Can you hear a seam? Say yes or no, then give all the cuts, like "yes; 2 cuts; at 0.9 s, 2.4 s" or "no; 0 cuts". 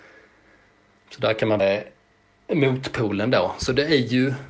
yes; 1 cut; at 1.6 s